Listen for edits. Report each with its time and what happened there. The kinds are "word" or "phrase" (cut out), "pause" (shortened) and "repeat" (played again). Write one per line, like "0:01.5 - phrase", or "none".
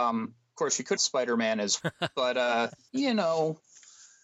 0:01.0 - phrase
0:01.8 - word